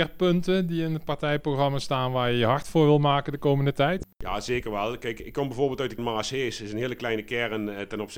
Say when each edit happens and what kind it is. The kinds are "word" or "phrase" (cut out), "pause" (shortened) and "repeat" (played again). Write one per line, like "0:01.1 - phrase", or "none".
0:04.1 - pause
0:06.0 - word